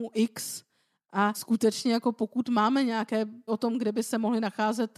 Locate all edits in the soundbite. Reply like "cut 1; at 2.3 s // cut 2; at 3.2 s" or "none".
cut 1; at 3.5 s